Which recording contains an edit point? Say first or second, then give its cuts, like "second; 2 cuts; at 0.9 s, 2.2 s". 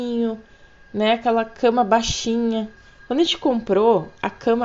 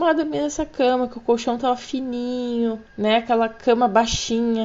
second; 1 cut; at 2.9 s